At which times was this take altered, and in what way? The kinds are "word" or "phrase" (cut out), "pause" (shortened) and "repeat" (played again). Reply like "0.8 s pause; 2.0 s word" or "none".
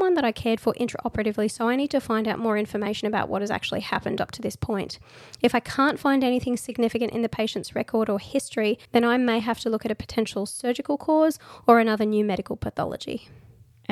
8.9 s pause